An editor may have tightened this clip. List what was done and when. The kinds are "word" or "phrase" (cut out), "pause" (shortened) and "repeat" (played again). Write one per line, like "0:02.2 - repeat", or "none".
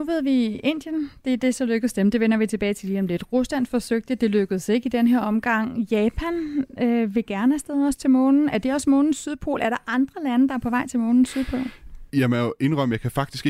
0:12.1 - pause